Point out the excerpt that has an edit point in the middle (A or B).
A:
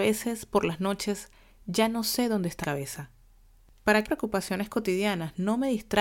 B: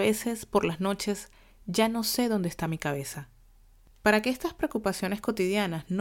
A